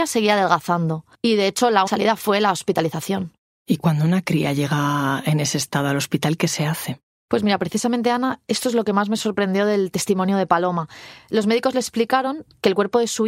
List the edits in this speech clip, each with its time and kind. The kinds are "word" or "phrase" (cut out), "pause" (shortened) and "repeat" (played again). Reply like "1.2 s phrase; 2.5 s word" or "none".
1.1 s pause; 1.9 s word